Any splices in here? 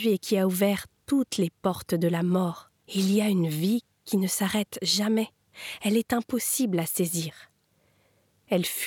yes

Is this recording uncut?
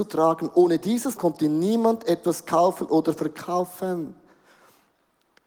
no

